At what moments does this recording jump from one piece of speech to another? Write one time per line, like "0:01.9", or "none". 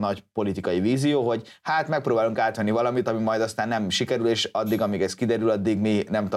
none